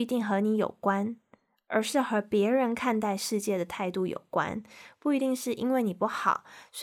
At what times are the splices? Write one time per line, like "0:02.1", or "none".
none